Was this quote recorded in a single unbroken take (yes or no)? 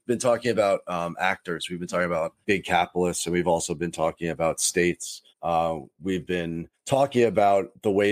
no